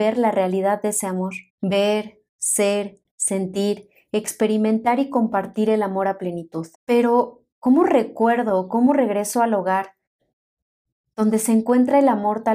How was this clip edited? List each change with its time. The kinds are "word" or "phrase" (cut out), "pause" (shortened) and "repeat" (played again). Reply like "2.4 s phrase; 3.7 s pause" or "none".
1.5 s pause; 6.7 s pause